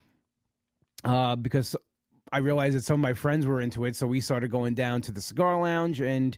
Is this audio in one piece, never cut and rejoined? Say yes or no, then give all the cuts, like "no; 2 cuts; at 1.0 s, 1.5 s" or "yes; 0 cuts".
yes; 0 cuts